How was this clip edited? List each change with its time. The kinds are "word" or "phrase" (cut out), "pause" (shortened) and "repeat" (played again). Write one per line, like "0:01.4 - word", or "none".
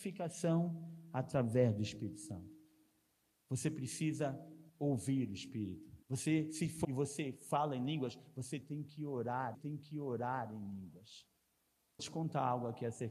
0:04.7 - pause
0:06.0 - pause
0:06.8 - word
0:09.5 - repeat
0:12.0 - phrase